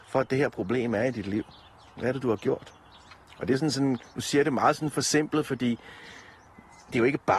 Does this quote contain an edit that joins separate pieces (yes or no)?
no